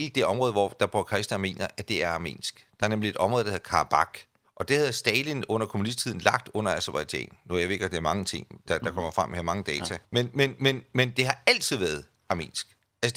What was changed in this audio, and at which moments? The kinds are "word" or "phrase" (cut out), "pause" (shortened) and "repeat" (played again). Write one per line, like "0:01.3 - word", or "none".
0:04.4 - pause
0:10.0 - pause